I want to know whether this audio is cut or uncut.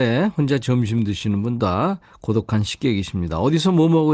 cut